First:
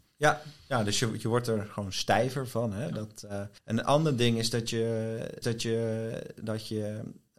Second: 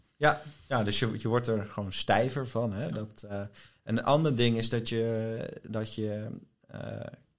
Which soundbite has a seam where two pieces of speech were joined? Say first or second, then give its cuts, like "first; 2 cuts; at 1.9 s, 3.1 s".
first; 2 cuts; at 3.6 s, 5.4 s